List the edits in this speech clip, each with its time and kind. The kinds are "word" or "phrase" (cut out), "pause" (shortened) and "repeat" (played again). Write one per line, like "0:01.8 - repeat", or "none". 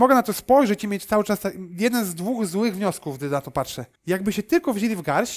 0:04.0 - pause